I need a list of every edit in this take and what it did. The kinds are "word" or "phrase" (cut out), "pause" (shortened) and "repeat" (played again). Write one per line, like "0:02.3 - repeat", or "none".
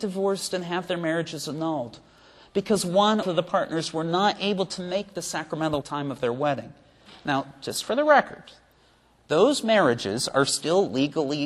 0:03.2 - phrase
0:05.8 - phrase